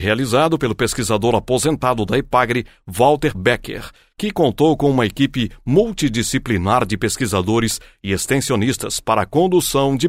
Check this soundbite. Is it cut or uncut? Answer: cut